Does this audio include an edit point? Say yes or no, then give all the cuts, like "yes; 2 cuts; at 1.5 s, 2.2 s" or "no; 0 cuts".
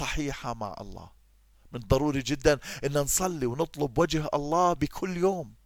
no; 0 cuts